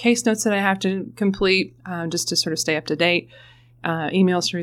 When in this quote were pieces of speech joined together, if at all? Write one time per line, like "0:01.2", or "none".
0:01.8